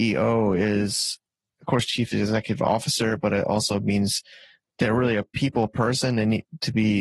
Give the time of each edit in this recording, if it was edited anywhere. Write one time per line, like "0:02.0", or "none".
none